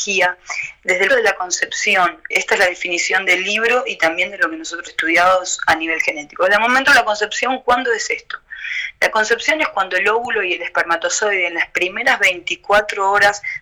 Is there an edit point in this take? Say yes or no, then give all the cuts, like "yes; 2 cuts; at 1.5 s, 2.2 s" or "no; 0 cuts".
yes; 3 cuts; at 1.1 s, 2.3 s, 4.9 s